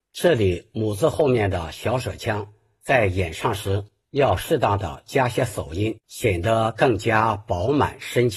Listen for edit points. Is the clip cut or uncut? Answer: cut